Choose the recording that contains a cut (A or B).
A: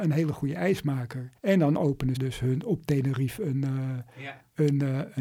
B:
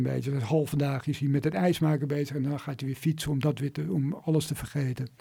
A